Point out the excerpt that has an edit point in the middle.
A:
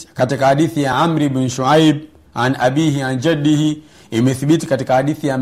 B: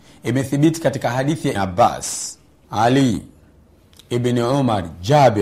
B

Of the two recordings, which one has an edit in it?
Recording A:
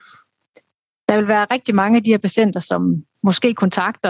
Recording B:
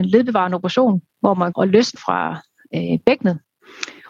B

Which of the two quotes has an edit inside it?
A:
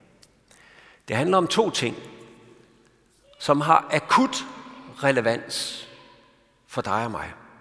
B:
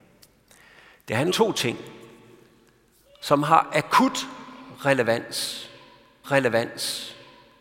B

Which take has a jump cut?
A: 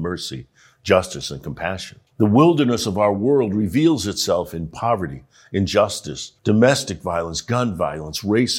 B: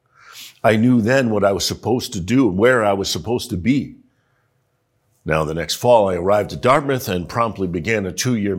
A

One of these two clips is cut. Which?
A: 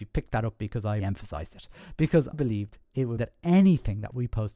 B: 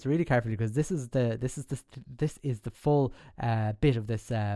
A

